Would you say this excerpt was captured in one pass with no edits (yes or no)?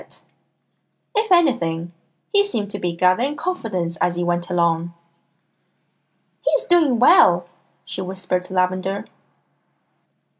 yes